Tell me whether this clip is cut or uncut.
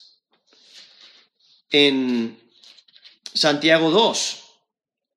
uncut